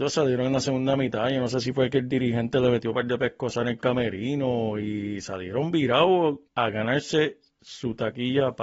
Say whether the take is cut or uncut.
cut